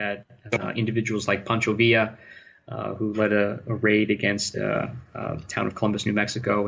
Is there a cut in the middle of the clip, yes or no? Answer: no